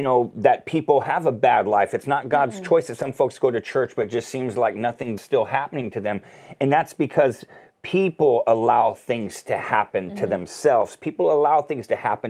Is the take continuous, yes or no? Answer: no